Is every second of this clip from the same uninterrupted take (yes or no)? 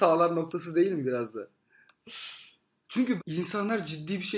no